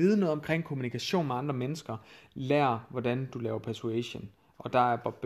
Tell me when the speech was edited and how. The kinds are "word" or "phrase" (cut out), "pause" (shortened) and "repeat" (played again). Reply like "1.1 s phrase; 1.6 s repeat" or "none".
none